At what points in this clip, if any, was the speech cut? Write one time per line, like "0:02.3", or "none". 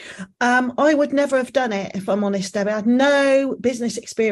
none